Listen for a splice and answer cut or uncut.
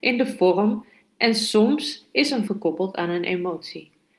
cut